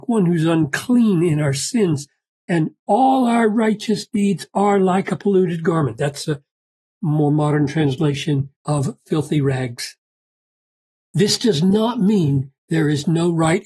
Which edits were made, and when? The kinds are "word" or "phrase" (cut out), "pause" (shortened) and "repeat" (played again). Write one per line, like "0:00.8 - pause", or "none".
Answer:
0:08.6 - pause